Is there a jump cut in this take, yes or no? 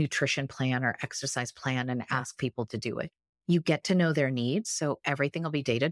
no